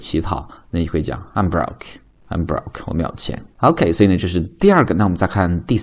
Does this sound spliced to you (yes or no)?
no